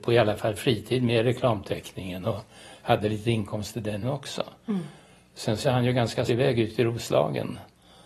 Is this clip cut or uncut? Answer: cut